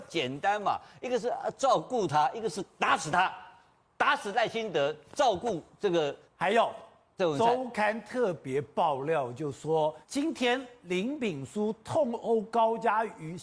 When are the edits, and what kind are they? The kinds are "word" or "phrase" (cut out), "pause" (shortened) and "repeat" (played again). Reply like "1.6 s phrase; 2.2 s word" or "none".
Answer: 6.2 s pause; 10.0 s pause